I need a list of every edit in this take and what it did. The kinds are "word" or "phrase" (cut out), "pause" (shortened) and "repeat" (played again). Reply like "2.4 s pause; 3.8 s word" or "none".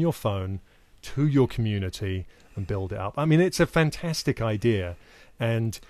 none